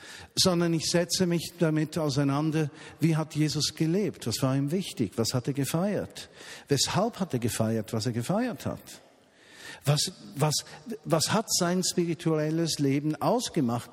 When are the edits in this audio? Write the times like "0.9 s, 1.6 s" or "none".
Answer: none